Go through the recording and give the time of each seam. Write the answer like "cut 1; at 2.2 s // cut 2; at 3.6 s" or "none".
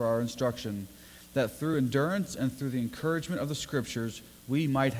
none